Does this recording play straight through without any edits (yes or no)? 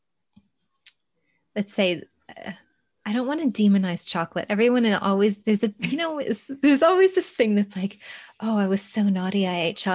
yes